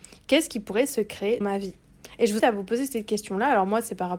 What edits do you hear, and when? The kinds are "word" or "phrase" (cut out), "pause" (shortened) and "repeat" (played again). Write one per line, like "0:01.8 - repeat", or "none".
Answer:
0:01.4 - word
0:02.4 - word

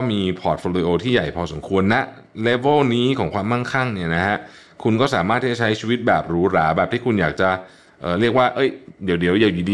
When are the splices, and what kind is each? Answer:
none

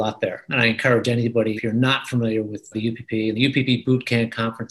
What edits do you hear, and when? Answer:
0:01.6 - word
0:02.7 - word

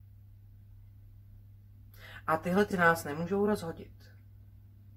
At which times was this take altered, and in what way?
0:02.7 - word

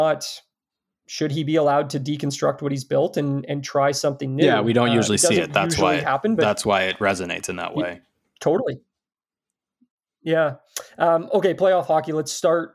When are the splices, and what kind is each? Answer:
none

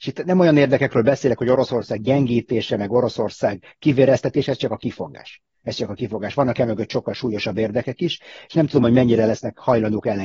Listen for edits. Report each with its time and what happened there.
none

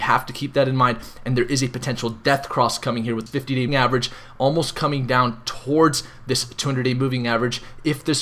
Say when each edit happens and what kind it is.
0:03.3 - word
0:03.7 - word

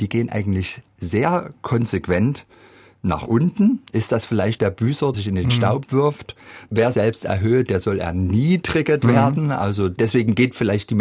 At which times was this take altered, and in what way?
0:04.6 - word
0:05.1 - word
0:06.9 - word

